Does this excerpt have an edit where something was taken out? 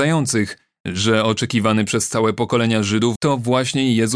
yes; 1 cut; at 3.2 s

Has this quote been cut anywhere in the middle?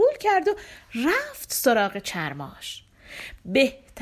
no; 0 cuts

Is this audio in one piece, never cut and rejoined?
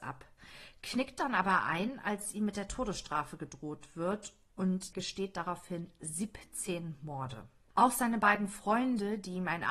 no; 2 cuts; at 4.9 s, 7.6 s

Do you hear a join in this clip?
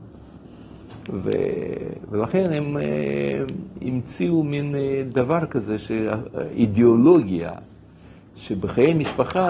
no; 0 cuts

